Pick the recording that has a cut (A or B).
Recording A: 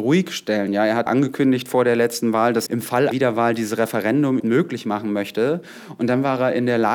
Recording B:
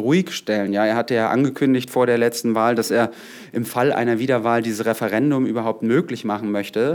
A